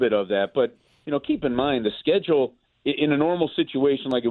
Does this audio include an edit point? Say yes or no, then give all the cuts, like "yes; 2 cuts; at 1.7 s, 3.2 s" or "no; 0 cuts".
no; 0 cuts